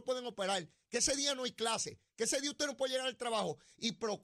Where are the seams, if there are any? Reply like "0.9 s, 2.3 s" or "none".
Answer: none